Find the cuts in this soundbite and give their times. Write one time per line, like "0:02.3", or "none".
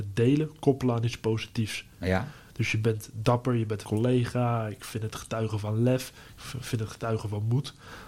0:03.8